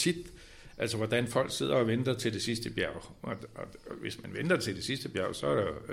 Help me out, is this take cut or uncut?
uncut